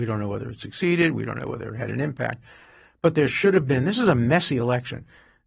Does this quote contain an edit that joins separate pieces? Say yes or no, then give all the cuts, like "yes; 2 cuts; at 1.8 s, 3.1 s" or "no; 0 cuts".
no; 0 cuts